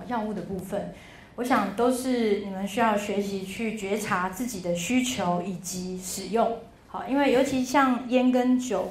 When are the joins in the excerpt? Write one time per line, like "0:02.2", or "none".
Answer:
0:06.8